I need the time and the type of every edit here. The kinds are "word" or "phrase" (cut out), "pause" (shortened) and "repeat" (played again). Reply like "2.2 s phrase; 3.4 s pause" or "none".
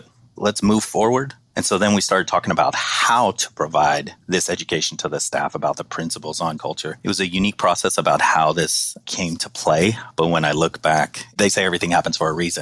4.2 s pause; 6.6 s word